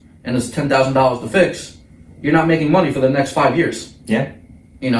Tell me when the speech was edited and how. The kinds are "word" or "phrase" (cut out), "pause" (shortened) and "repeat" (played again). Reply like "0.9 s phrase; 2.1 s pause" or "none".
none